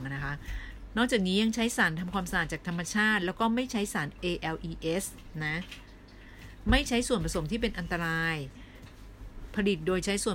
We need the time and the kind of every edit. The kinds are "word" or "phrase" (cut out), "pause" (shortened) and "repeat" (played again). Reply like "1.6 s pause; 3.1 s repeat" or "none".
4.2 s word